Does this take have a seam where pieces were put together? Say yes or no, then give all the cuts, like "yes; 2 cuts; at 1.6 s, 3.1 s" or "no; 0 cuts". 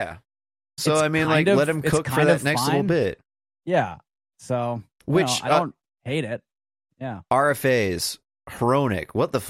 no; 0 cuts